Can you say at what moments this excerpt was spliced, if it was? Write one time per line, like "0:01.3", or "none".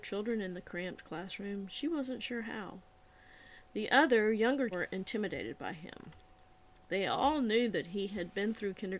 0:04.7